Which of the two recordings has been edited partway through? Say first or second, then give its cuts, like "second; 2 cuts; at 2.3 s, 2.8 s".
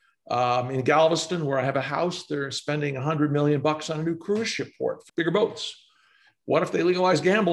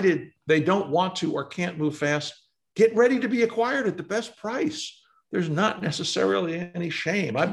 first; 1 cut; at 5.1 s